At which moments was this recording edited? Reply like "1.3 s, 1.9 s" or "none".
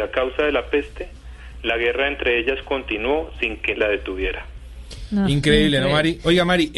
3.7 s